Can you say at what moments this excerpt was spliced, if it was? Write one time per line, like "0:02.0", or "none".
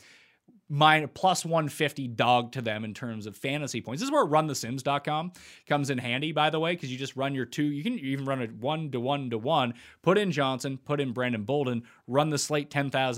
0:10.8